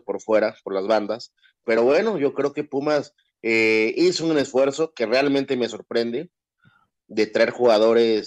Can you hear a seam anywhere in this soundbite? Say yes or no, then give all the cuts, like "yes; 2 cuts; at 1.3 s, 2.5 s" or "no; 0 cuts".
no; 0 cuts